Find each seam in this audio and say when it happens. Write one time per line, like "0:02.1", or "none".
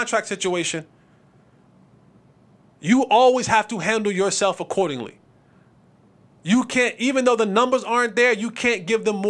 none